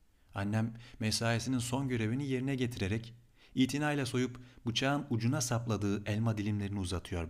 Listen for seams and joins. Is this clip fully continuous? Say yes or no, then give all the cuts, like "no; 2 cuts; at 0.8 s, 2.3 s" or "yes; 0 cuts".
yes; 0 cuts